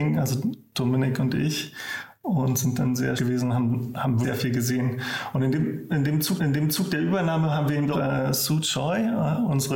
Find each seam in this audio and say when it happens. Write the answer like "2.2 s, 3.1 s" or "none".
3.2 s, 4.2 s, 6.4 s, 7.9 s